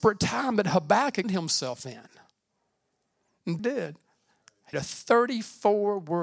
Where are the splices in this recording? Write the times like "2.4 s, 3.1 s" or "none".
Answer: 1.2 s, 3.6 s, 4.7 s